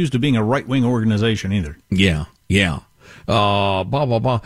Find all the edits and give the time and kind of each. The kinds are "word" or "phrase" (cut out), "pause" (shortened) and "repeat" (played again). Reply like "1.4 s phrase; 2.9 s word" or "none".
1.8 s pause